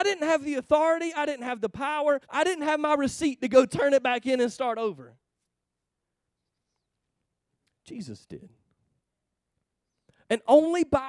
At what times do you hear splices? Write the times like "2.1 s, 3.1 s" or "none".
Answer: 2.2 s